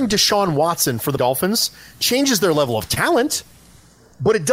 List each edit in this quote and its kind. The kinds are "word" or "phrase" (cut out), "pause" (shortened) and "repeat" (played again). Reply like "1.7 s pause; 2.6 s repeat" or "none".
1.2 s word